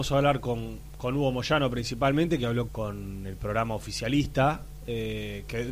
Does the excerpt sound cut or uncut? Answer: cut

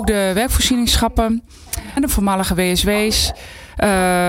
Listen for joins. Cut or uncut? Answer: cut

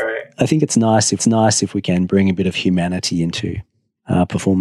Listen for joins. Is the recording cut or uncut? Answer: cut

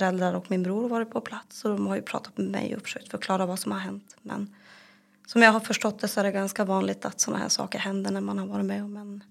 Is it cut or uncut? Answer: uncut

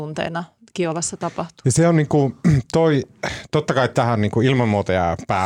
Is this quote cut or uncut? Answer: uncut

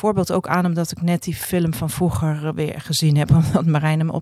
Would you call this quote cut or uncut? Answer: uncut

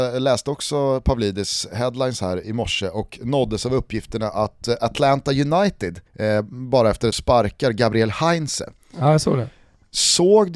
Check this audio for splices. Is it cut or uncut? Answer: cut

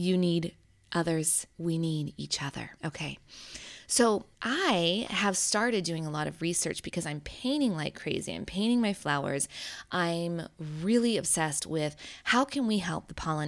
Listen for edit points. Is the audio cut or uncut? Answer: cut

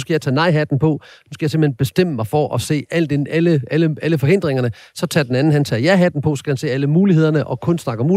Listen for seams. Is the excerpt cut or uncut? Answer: uncut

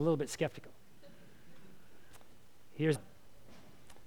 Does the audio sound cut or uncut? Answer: cut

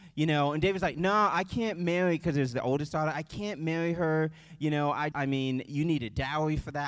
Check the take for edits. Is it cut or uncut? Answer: cut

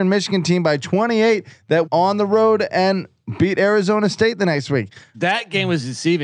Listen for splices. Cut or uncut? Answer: cut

